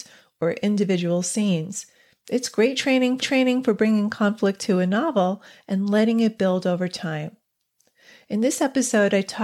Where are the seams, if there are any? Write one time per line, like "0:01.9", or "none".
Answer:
0:03.2